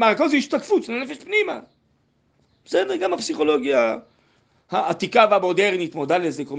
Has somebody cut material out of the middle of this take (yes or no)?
no